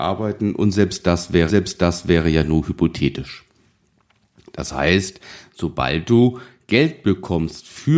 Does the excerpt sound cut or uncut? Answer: cut